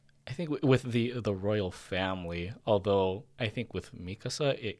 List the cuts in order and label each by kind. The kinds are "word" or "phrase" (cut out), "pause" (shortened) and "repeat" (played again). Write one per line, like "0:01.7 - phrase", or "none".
none